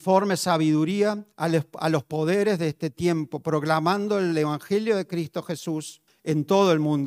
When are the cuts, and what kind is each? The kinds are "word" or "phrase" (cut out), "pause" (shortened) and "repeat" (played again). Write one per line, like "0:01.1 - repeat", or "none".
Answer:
0:01.3 - pause
0:06.1 - pause